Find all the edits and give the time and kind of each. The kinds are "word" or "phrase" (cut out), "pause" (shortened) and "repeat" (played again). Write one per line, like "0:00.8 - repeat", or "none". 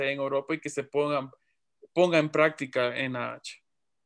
none